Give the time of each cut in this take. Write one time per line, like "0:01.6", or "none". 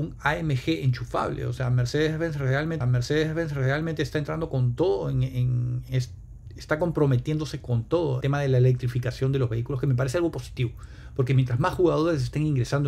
0:02.8
0:05.9
0:08.2